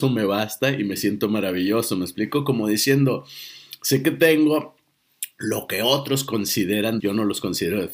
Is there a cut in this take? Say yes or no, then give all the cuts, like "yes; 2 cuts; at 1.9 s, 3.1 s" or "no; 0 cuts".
yes; 1 cut; at 7.0 s